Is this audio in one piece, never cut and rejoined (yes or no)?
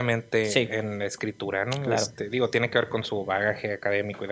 yes